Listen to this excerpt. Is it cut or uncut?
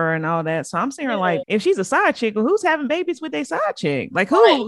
cut